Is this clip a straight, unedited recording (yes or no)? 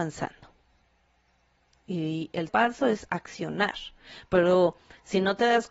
no